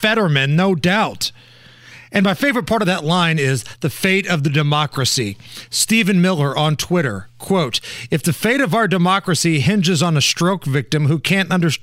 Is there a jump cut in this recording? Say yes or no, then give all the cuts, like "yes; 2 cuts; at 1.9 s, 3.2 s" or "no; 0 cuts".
no; 0 cuts